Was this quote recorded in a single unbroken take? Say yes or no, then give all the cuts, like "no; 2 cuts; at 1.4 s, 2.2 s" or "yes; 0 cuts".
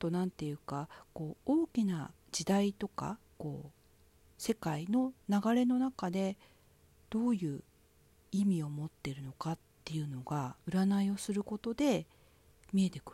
no; 3 cuts; at 2.2 s, 9.8 s, 10.6 s